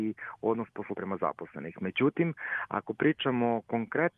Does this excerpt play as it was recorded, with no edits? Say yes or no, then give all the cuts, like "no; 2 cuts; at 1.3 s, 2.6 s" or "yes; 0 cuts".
no; 1 cut; at 0.9 s